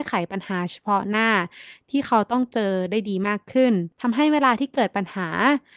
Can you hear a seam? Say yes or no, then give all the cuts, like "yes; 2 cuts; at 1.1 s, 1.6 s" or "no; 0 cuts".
yes; 1 cut; at 3.9 s